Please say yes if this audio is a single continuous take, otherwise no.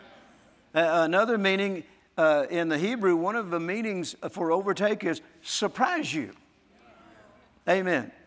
yes